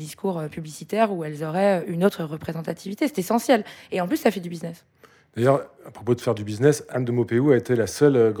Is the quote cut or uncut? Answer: uncut